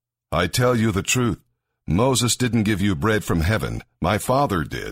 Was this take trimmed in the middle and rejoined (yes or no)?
no